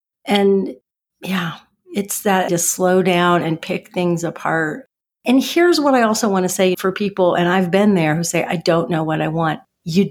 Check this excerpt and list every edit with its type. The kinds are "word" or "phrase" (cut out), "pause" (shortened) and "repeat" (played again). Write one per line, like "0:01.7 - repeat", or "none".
0:02.5 - word